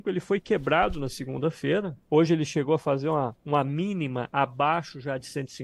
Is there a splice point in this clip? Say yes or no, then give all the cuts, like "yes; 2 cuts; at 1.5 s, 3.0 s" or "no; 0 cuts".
yes; 2 cuts; at 2.0 s, 3.4 s